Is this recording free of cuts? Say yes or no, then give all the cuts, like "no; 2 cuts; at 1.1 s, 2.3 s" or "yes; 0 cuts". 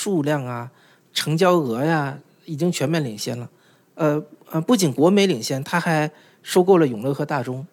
yes; 0 cuts